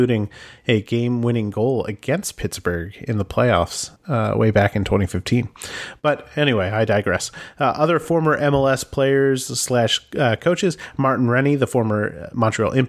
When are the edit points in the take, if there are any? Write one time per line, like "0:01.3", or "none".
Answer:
0:04.0